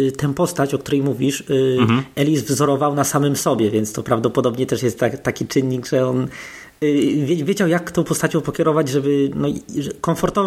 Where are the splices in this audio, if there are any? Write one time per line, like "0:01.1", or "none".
none